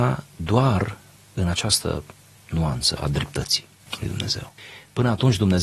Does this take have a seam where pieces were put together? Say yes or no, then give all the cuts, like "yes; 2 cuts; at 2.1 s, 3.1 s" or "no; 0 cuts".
no; 0 cuts